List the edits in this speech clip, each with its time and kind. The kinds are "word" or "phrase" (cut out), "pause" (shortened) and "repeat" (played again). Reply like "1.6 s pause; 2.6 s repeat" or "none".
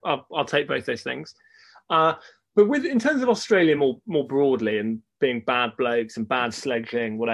none